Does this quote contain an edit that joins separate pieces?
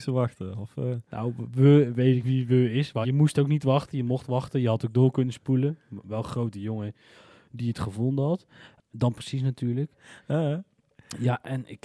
yes; 2 cuts; at 2.2 s, 3.0 s

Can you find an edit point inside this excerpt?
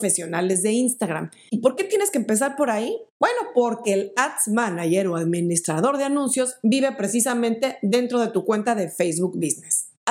no; 0 cuts

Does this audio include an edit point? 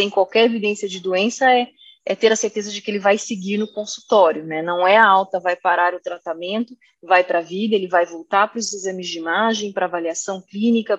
no; 0 cuts

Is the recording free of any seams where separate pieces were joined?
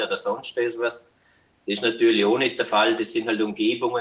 yes; 0 cuts

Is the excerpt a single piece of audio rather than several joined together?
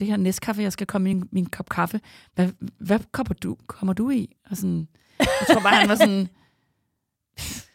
yes; 0 cuts

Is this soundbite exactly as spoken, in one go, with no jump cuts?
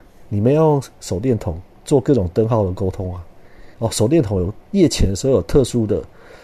no; 2 cuts; at 3.7 s, 4.7 s

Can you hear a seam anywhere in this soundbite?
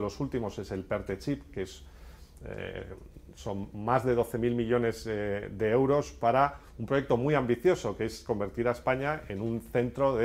no; 0 cuts

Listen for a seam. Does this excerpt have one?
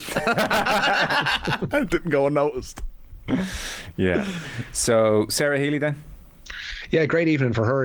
no; 0 cuts

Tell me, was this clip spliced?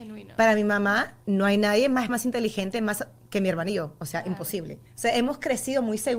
yes; 2 cuts; at 2.1 s, 4.9 s

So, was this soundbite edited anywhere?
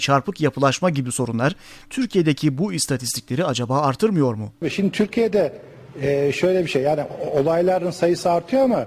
no; 0 cuts

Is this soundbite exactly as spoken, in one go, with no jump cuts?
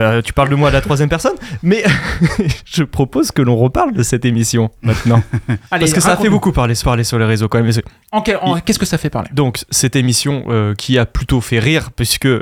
no; 1 cut; at 6.8 s

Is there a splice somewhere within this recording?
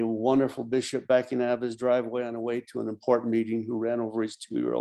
no; 0 cuts

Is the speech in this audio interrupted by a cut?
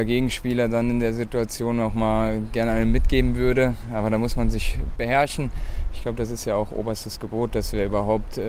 no; 0 cuts

